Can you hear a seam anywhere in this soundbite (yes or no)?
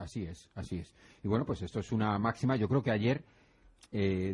no